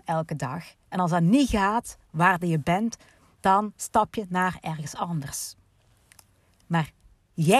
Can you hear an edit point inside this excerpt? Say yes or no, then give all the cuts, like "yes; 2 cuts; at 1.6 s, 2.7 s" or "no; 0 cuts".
no; 0 cuts